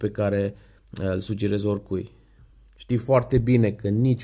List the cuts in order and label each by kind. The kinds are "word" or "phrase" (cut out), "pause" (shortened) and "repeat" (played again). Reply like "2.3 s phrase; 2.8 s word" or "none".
none